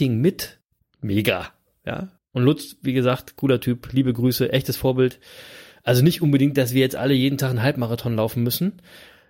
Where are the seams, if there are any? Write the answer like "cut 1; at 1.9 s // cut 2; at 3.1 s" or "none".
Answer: cut 1; at 2.2 s